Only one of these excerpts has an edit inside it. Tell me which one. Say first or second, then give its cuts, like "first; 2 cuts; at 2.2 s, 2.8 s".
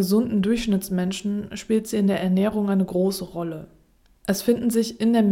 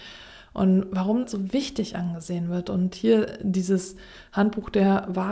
second; 1 cut; at 1.2 s